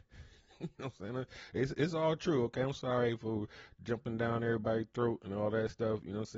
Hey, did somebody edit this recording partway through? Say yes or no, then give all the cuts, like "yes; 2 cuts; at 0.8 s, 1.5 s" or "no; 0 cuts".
no; 0 cuts